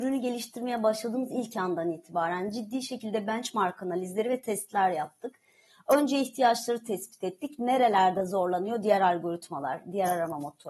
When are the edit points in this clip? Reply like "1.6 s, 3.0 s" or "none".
none